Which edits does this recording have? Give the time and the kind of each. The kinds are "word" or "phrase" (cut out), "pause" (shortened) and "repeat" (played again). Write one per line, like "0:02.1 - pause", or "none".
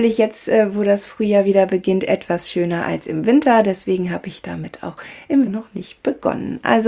0:05.5 - word